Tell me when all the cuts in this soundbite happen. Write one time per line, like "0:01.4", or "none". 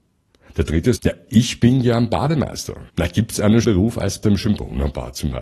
0:01.0
0:02.9
0:03.6
0:04.2